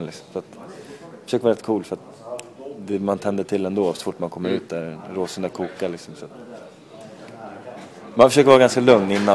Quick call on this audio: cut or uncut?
uncut